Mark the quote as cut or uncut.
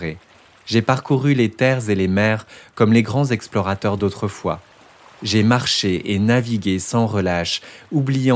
uncut